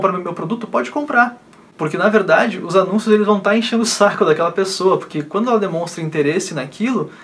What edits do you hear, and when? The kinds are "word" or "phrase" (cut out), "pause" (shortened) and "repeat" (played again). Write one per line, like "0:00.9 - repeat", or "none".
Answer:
none